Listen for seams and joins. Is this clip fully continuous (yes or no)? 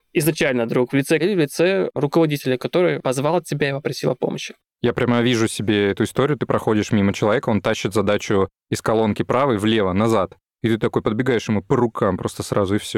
no